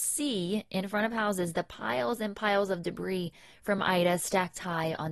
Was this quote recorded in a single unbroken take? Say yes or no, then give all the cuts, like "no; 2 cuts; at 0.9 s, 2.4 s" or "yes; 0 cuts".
yes; 0 cuts